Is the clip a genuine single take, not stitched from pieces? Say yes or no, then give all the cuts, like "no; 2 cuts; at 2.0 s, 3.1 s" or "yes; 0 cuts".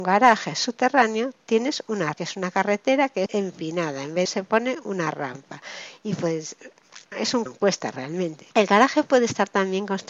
no; 6 cuts; at 2.1 s, 3.3 s, 4.3 s, 7.1 s, 7.5 s, 8.5 s